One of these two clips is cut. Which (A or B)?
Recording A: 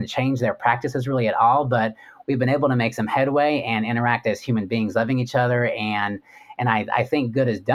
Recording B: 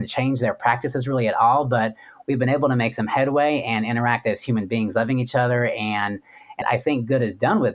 B